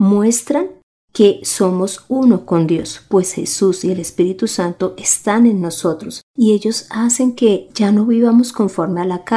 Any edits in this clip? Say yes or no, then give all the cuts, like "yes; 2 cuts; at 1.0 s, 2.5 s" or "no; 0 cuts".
no; 0 cuts